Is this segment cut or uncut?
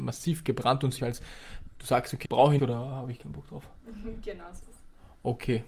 cut